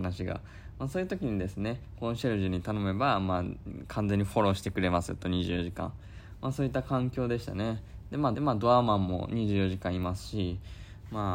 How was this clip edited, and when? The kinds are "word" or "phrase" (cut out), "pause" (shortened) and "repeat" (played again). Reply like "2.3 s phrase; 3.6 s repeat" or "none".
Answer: 8.3 s repeat